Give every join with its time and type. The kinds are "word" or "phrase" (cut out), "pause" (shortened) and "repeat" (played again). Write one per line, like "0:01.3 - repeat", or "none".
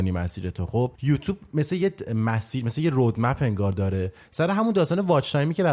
0:00.9 - pause